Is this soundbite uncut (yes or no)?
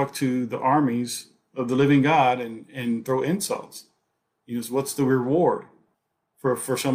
yes